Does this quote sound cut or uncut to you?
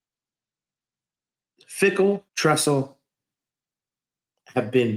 cut